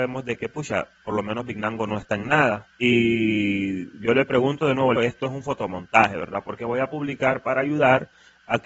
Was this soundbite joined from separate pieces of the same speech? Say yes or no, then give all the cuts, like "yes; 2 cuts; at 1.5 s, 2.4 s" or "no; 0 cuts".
yes; 2 cuts; at 2.7 s, 5.0 s